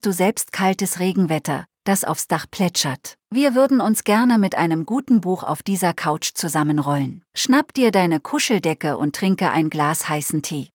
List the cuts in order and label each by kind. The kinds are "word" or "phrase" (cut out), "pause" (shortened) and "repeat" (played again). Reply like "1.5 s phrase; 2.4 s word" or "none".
3.2 s pause; 7.3 s pause